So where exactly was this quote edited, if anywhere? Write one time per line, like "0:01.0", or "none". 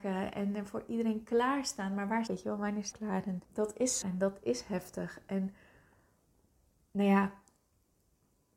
0:02.3
0:02.9
0:03.4
0:04.0